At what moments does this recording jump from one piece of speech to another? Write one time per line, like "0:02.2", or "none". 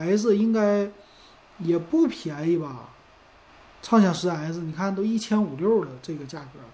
none